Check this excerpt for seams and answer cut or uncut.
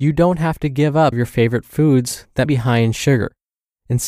cut